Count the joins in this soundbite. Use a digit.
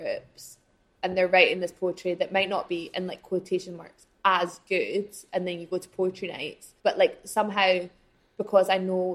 1